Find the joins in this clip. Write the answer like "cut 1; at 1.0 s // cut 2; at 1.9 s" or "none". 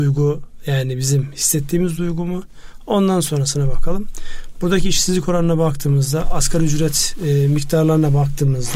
none